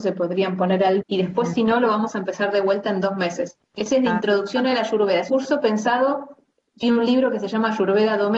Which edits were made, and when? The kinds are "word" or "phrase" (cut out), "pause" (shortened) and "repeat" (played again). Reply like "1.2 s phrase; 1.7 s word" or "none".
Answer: 1.0 s word; 3.6 s pause; 5.3 s word; 6.8 s word